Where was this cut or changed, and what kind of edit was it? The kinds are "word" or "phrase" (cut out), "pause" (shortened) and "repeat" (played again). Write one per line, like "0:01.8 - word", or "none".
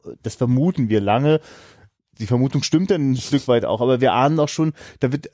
none